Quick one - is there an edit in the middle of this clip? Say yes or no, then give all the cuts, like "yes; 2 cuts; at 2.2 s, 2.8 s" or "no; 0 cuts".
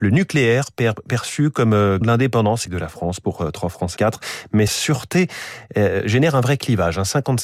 yes; 4 cuts; at 2.0 s, 2.7 s, 4.0 s, 4.7 s